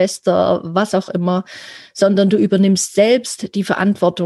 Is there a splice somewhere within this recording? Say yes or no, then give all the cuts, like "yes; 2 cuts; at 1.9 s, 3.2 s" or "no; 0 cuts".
no; 0 cuts